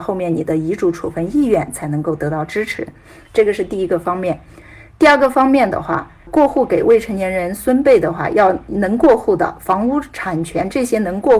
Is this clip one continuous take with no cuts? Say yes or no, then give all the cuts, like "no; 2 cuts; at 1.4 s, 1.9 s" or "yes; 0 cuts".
yes; 0 cuts